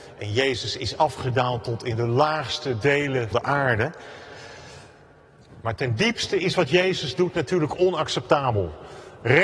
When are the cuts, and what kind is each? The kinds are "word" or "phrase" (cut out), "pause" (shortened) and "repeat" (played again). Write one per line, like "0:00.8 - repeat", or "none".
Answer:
0:03.3 - word